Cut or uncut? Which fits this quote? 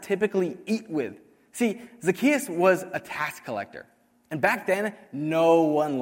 uncut